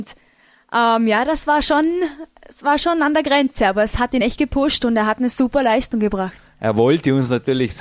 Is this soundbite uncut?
yes; 0 cuts

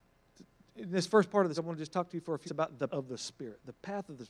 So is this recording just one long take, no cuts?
no; 3 cuts; at 1.6 s, 2.5 s, 2.9 s

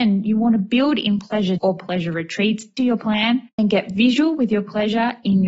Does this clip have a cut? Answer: yes; 3 cuts; at 1.6 s, 2.8 s, 3.6 s

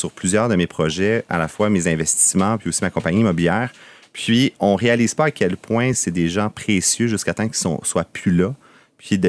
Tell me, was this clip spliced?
no; 0 cuts

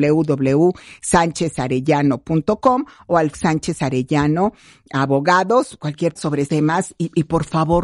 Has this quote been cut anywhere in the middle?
yes; 3 cuts; at 3.3 s, 6.2 s, 6.5 s

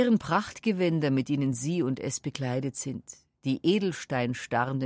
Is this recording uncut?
yes; 0 cuts

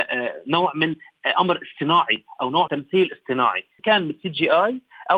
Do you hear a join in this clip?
yes; 2 cuts; at 2.7 s, 3.8 s

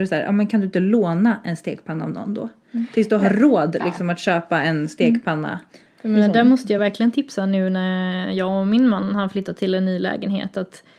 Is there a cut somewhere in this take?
no; 0 cuts

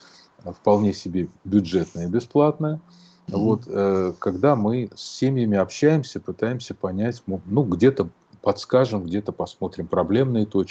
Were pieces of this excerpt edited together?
no; 0 cuts

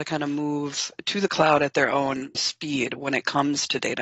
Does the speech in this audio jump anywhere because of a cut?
yes; 1 cut; at 2.3 s

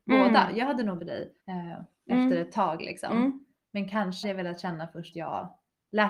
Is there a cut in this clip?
yes; 4 cuts; at 1.0 s, 1.4 s, 4.2 s, 5.1 s

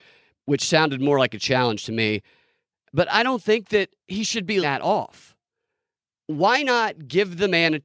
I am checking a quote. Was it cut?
yes; 2 cuts; at 4.0 s, 4.6 s

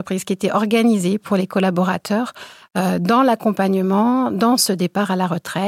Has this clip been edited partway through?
no; 0 cuts

